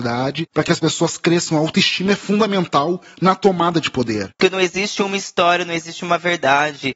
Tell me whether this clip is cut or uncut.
uncut